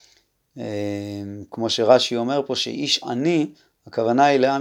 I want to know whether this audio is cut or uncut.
uncut